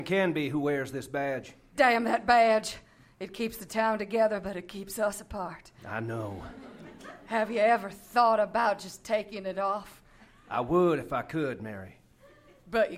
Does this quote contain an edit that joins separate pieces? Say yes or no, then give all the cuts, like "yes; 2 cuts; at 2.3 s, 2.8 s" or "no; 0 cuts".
no; 0 cuts